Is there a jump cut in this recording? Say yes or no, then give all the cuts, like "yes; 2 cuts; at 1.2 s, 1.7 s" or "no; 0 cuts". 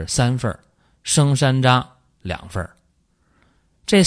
no; 0 cuts